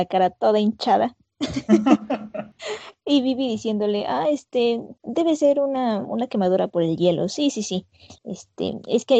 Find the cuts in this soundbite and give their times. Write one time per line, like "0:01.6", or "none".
0:05.0
0:08.2